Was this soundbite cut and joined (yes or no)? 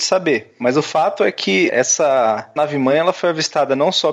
no